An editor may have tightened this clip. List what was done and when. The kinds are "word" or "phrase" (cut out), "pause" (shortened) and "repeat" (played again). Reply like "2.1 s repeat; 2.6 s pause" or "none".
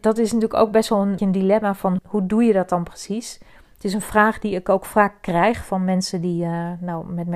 1.2 s word; 2.0 s word